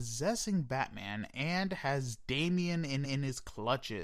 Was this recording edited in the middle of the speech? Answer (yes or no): yes